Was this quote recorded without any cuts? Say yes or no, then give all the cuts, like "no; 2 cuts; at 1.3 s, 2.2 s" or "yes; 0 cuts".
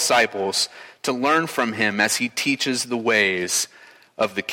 yes; 0 cuts